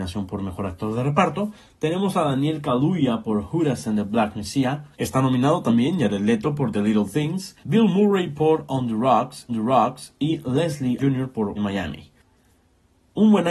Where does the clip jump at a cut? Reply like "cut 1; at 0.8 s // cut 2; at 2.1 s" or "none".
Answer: cut 1; at 4.9 s // cut 2; at 7.6 s // cut 3; at 9.5 s // cut 4; at 11.0 s // cut 5; at 11.6 s